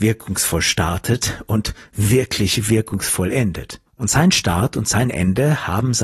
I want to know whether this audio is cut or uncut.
cut